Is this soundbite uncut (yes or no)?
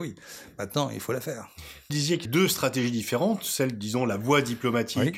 no